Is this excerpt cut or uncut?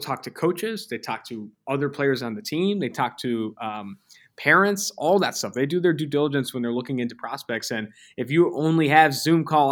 uncut